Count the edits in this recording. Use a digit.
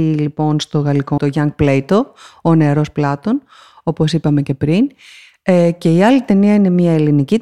1